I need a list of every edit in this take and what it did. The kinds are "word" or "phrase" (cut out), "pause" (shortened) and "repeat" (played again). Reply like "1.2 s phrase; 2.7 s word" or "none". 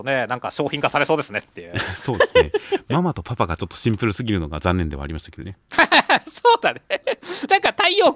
5.6 s pause